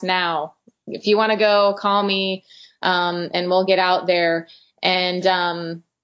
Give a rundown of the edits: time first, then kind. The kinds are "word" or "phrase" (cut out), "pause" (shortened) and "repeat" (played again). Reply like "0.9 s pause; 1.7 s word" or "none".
none